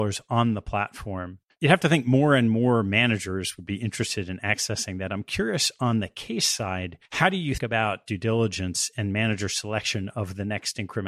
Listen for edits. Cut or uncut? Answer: cut